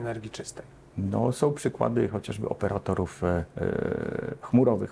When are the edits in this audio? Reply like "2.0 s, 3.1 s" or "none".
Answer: 3.5 s